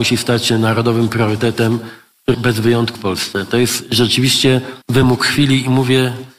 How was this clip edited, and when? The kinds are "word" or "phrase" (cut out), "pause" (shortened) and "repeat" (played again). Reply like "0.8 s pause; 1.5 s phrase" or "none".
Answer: 2.3 s word; 2.9 s word; 4.8 s pause

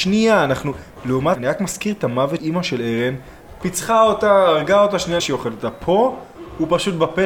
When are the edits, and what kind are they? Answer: 1.3 s word; 2.4 s word; 5.2 s word

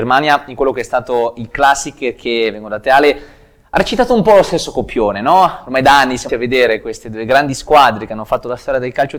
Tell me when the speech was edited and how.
6.3 s word

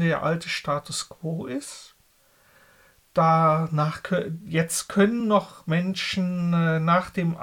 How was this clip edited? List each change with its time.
none

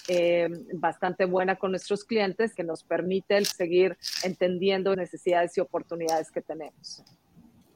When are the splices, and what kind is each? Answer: 2.6 s word; 3.5 s word; 4.9 s word

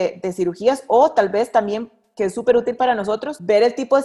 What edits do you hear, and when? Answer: none

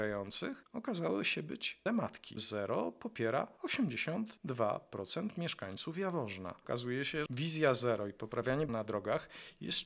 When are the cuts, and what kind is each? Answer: 1.9 s word; 2.4 s phrase; 7.3 s word; 8.7 s word

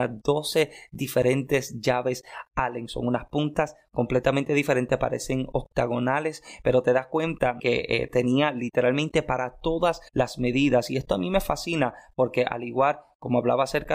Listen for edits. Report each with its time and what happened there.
7.6 s word; 10.1 s pause

